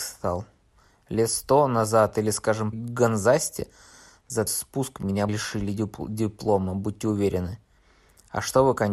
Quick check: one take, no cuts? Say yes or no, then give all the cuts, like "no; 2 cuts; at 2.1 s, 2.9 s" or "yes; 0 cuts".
no; 3 cuts; at 2.7 s, 4.5 s, 5.3 s